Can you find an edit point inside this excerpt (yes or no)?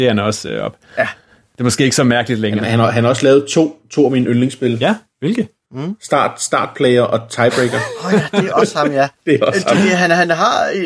no